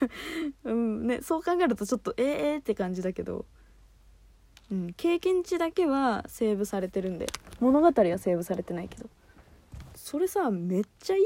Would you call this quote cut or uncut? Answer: uncut